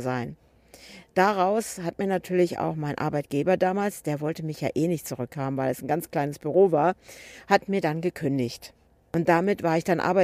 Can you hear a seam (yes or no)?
no